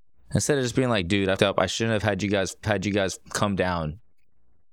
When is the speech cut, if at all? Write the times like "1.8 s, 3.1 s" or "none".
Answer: 1.4 s, 2.6 s